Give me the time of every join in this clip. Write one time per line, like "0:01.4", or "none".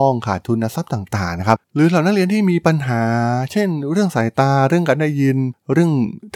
0:01.6